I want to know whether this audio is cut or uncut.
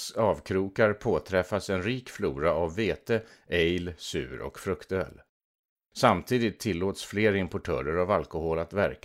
uncut